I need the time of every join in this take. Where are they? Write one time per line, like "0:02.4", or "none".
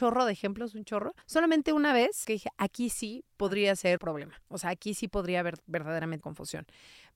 0:01.2
0:02.2
0:03.3
0:04.0
0:06.2

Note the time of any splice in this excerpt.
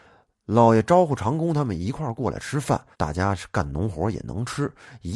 0:02.9

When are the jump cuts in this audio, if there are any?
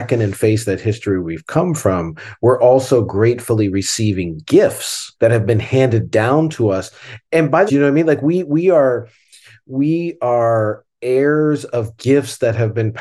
0:05.2
0:07.7

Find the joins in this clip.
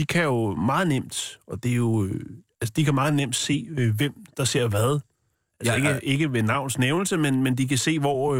none

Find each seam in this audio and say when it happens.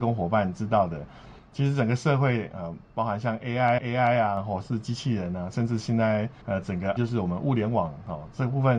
0:03.8
0:06.4
0:07.0

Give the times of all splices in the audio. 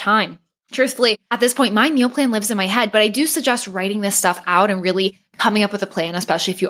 0:01.2

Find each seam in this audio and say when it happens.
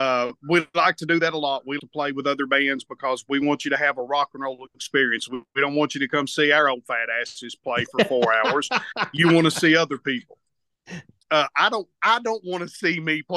0:01.8

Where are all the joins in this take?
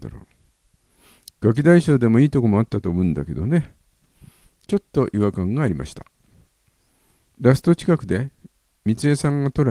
none

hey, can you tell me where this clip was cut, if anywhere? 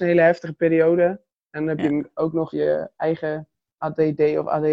0:02.5

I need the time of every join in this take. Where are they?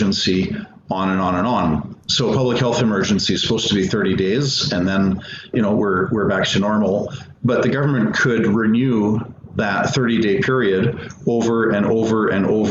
0:05.5

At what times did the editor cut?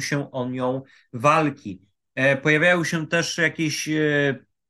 none

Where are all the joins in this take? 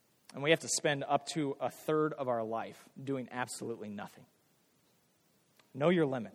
0:02.9

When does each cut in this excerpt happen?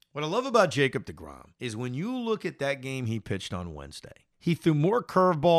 0:01.5
0:04.3

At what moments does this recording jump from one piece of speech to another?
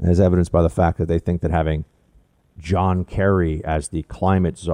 none

